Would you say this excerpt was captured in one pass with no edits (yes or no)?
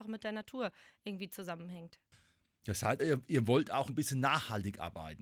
no